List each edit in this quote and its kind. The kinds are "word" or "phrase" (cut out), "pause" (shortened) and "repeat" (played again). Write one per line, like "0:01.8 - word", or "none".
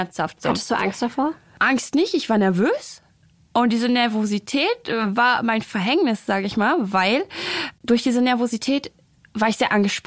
none